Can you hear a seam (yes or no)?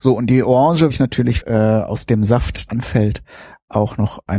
yes